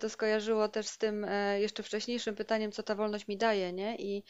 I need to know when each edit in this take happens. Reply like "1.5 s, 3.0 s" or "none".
none